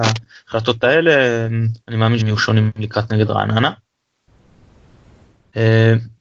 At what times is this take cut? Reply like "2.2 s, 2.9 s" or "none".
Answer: 1.8 s, 2.2 s, 3.1 s